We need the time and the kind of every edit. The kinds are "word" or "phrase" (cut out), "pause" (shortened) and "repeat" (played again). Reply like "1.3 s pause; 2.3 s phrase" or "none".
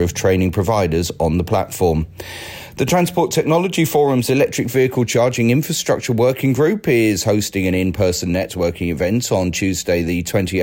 none